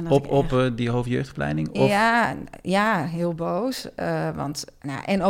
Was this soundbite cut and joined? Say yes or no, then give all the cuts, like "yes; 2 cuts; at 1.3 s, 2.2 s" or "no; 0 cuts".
no; 0 cuts